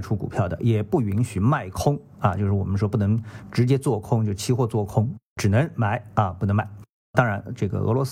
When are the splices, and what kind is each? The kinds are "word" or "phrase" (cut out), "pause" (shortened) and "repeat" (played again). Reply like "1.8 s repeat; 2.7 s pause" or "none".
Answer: none